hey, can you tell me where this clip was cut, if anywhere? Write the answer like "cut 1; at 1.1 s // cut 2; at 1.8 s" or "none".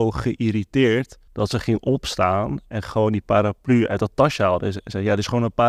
cut 1; at 1.3 s